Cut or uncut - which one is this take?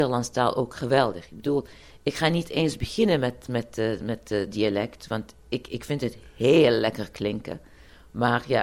uncut